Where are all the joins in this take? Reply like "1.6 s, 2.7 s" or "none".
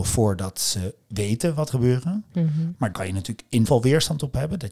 1.0 s, 1.7 s, 2.9 s, 3.6 s